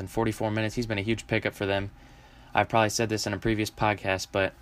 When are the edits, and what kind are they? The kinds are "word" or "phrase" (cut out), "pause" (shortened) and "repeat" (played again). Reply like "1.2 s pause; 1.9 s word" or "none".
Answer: none